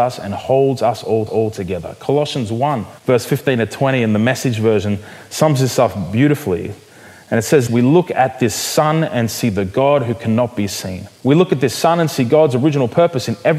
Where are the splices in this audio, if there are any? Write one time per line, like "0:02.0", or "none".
0:01.3
0:03.0
0:07.7
0:11.2